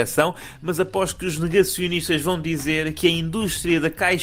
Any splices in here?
no; 0 cuts

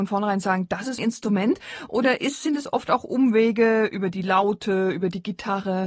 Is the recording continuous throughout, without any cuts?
no; 1 cut; at 1.0 s

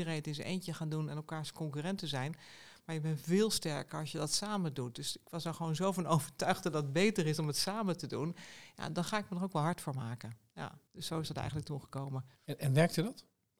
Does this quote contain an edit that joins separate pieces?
yes; 2 cuts; at 10.9 s, 12.4 s

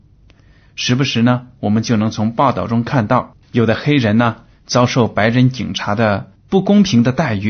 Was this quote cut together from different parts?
yes; 1 cut; at 3.4 s

